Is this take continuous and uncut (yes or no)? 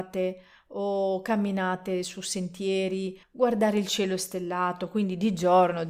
no